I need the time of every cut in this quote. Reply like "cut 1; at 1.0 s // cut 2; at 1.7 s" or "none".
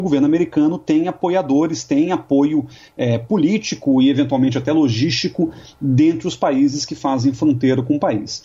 none